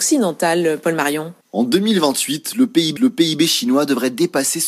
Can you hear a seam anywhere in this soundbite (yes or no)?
yes